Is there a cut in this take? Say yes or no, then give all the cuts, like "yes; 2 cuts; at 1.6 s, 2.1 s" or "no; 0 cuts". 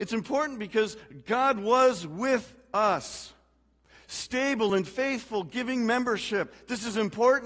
no; 0 cuts